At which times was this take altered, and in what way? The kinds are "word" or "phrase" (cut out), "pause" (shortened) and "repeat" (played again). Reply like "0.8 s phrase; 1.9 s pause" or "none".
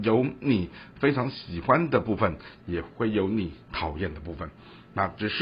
3.6 s pause